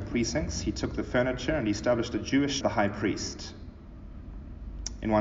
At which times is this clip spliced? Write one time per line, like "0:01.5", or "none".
0:02.6